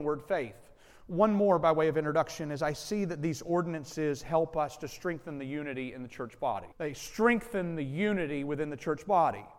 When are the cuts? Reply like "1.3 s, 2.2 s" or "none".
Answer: 6.7 s